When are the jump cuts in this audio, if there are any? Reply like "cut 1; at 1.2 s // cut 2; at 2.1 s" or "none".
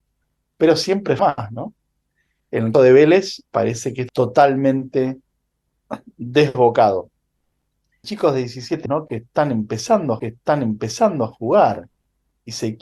cut 1; at 1.2 s // cut 2; at 2.7 s // cut 3; at 3.5 s // cut 4; at 4.1 s // cut 5; at 8.0 s // cut 6; at 8.9 s // cut 7; at 10.2 s